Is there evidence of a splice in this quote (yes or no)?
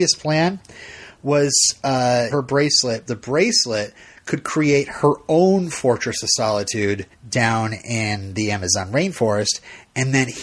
yes